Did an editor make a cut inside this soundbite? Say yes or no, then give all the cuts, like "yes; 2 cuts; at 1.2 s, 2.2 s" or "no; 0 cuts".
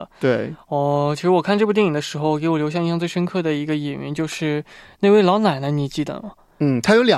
no; 0 cuts